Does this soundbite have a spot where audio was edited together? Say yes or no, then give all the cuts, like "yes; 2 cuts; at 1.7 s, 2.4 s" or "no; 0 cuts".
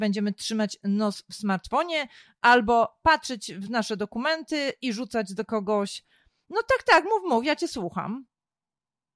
no; 0 cuts